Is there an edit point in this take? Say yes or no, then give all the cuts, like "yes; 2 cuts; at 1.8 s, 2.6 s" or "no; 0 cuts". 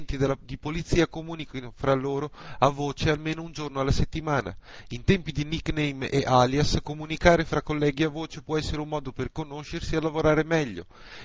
no; 0 cuts